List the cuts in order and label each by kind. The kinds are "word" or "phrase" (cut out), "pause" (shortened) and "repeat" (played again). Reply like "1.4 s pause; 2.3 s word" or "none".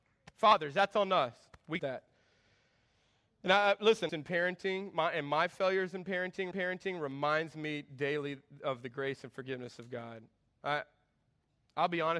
1.8 s phrase; 4.1 s phrase; 6.5 s repeat

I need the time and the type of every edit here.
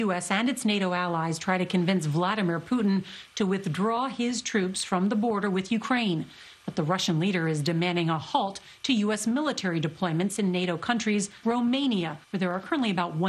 11.4 s word; 12.2 s pause

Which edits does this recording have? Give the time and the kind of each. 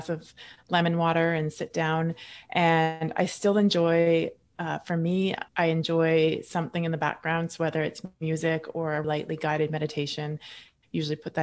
5.5 s pause; 9.0 s word

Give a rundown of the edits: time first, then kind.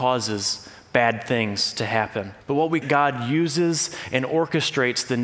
2.4 s pause; 2.8 s phrase

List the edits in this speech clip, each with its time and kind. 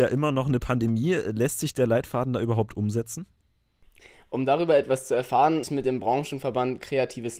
5.6 s word

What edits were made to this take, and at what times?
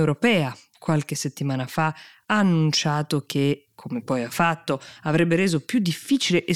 none

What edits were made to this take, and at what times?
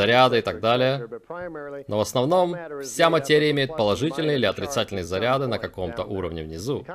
none

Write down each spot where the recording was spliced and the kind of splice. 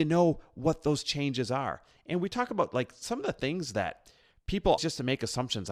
4.8 s word

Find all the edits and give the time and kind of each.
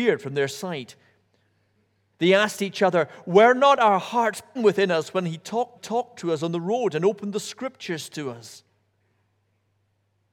4.6 s word; 5.8 s repeat

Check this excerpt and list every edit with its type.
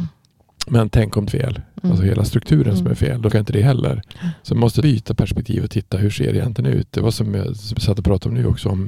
1.3 s phrase; 3.3 s word; 4.8 s word; 7.7 s word

